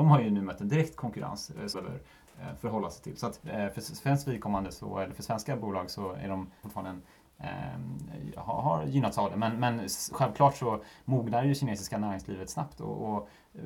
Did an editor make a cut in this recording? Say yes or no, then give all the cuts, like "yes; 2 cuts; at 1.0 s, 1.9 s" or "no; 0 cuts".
yes; 3 cuts; at 1.7 s, 3.4 s, 6.6 s